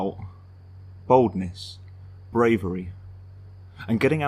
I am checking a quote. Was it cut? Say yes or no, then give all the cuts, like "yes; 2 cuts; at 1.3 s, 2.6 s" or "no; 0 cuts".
yes; 1 cut; at 2.3 s